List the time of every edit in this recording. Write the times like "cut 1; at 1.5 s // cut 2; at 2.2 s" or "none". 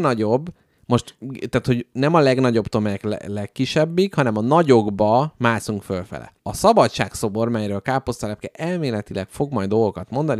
cut 1; at 6.4 s